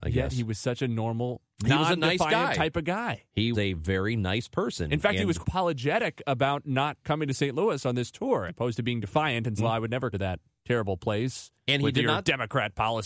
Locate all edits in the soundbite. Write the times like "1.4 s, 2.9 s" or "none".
3.5 s, 5.4 s, 7.0 s, 8.5 s, 9.6 s, 10.1 s